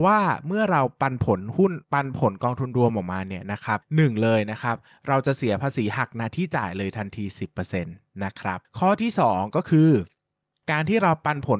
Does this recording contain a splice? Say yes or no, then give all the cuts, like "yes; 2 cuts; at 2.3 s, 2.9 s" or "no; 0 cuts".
yes; 1 cut; at 1.8 s